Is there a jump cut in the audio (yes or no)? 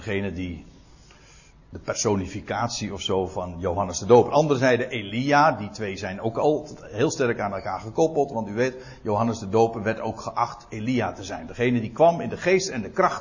no